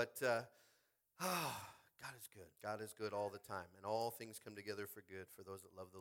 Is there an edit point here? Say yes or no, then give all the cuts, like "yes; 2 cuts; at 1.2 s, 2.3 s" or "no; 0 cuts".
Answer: yes; 1 cut; at 2.5 s